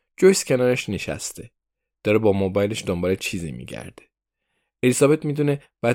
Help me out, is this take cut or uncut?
uncut